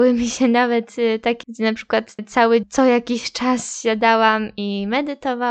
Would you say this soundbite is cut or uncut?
cut